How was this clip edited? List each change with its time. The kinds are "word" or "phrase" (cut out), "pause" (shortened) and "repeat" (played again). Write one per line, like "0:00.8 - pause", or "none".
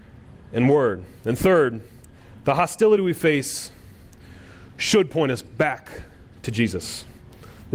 none